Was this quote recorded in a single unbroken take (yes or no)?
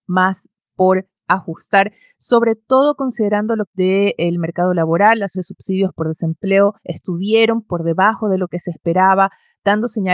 no